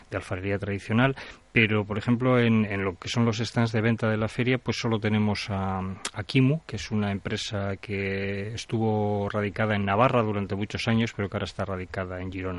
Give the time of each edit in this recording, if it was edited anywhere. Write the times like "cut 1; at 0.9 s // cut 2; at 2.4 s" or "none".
none